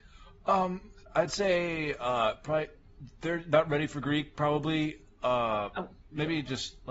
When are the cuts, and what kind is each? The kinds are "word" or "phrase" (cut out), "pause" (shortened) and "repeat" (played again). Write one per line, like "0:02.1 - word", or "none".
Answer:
0:01.0 - pause

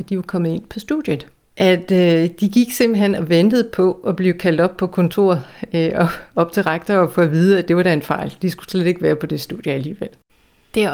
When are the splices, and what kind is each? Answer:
none

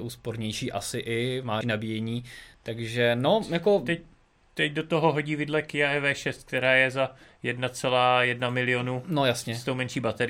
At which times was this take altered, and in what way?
0:01.6 - word

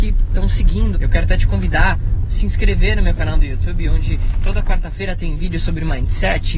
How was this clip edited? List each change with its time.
0:00.9 - phrase
0:02.2 - word

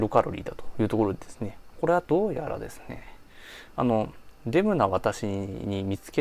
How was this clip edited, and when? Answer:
0:01.7 - word

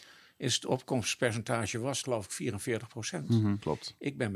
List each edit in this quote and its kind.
0:02.0 - phrase

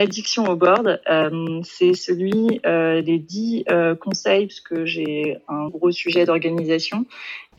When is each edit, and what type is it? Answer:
0:04.5 - phrase
0:05.7 - word

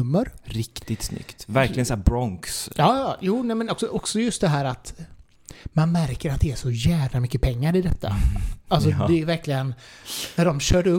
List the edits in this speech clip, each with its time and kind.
none

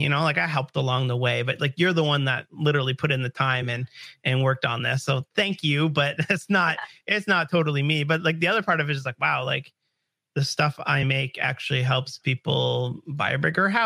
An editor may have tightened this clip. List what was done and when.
none

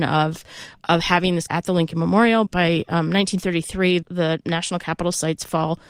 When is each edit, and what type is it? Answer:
0:01.5 - word
0:02.5 - word
0:04.0 - word

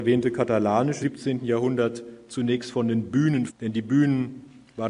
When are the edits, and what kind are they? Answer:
0:01.0 - word
0:03.5 - word

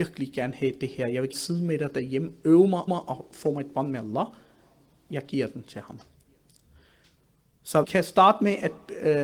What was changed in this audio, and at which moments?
0:01.3 - word
0:02.9 - repeat
0:07.8 - word

